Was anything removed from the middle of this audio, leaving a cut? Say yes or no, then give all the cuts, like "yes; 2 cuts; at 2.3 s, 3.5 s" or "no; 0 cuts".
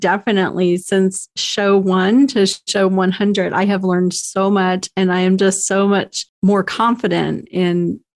no; 0 cuts